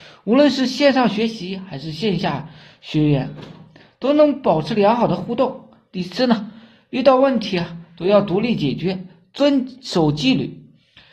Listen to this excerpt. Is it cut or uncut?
uncut